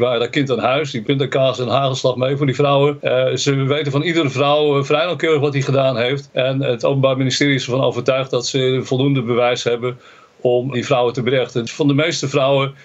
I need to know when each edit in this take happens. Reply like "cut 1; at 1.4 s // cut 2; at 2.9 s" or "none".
cut 1; at 1.0 s // cut 2; at 10.7 s